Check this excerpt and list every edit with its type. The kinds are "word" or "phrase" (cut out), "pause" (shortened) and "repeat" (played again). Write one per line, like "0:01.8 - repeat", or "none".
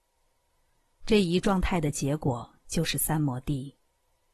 none